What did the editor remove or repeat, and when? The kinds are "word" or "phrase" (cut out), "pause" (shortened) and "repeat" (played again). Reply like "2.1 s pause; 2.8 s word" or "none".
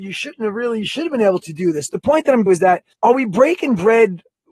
2.5 s phrase; 2.9 s pause